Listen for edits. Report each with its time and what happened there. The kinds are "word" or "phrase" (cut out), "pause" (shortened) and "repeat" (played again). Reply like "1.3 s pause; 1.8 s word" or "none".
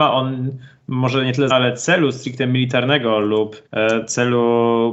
1.5 s word; 3.7 s pause